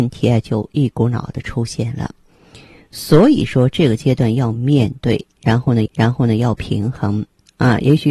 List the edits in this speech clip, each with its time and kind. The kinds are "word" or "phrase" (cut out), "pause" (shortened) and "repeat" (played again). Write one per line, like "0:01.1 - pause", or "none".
0:05.9 - repeat